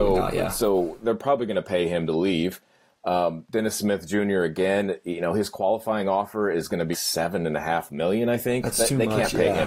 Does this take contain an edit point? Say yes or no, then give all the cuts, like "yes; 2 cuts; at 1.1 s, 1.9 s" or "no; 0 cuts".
yes; 1 cut; at 6.9 s